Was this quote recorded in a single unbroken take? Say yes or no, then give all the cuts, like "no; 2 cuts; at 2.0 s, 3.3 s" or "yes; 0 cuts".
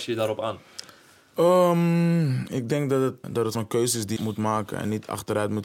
no; 4 cuts; at 1.0 s, 3.2 s, 3.5 s, 4.2 s